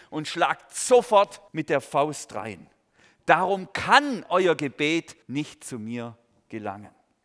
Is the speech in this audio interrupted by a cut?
yes; 2 cuts; at 1.5 s, 5.2 s

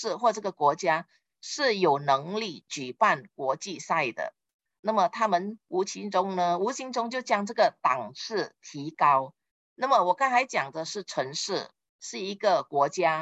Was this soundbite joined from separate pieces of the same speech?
no; 0 cuts

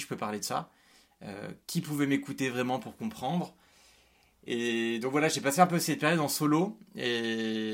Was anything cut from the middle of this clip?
no; 0 cuts

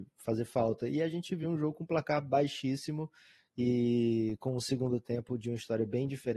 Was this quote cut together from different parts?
no; 0 cuts

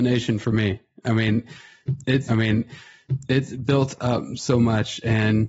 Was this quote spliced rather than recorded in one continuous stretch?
yes; 1 cut; at 2.3 s

